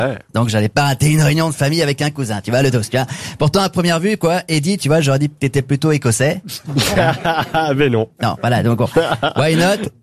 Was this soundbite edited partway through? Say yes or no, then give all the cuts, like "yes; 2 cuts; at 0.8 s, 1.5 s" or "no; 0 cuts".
no; 0 cuts